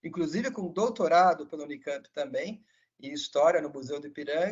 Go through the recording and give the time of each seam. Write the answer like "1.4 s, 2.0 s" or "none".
none